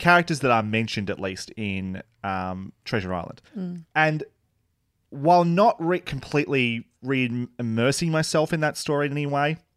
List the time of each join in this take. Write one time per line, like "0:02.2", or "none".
0:03.5